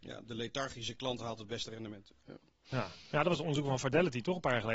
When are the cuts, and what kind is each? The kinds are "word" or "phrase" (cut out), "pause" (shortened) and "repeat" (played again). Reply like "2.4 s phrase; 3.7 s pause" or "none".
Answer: none